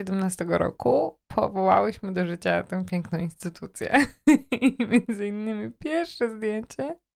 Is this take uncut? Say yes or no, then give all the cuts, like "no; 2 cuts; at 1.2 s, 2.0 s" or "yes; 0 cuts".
yes; 0 cuts